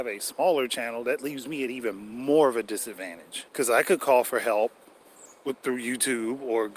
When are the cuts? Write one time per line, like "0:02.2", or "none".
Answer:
0:03.5